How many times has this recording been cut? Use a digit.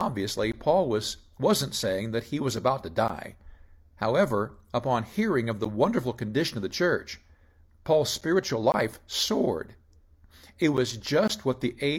0